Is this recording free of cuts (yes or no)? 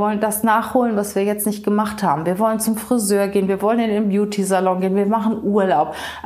yes